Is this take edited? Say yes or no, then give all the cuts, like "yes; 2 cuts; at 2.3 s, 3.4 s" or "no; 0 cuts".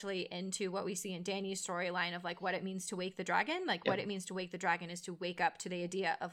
no; 0 cuts